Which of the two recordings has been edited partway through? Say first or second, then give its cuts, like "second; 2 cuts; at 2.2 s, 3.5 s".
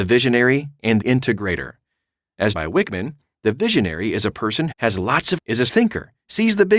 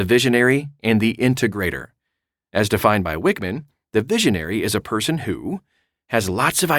first; 5 cuts; at 1.0 s, 2.5 s, 4.7 s, 5.4 s, 5.7 s